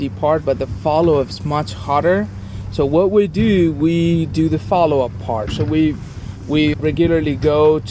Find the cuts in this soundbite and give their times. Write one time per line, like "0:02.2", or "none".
0:06.7